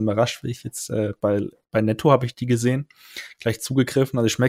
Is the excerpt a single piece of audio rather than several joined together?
yes; 0 cuts

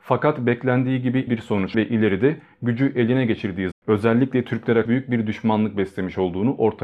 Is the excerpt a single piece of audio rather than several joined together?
no; 4 cuts; at 1.3 s, 1.7 s, 3.7 s, 4.9 s

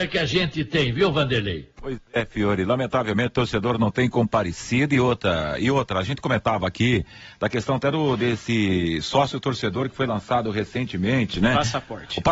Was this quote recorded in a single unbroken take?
yes; 0 cuts

